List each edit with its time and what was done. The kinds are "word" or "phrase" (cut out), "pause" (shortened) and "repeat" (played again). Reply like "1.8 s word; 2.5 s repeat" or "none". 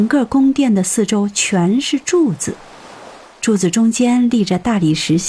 none